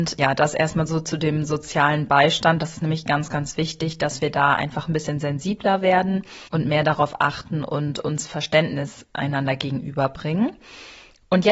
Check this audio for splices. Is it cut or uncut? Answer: cut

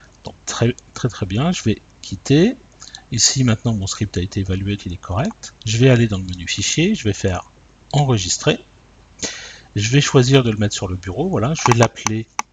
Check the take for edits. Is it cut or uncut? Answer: cut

